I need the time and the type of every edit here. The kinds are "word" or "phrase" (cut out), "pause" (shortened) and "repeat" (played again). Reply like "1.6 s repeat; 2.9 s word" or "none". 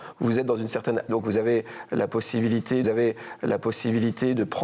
1.1 s word; 2.8 s repeat